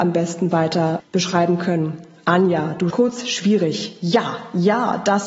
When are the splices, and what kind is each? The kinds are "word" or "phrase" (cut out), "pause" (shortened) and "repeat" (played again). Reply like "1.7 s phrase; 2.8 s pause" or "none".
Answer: 1.0 s word; 2.9 s word